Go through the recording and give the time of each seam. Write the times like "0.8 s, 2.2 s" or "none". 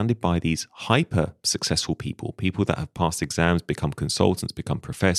none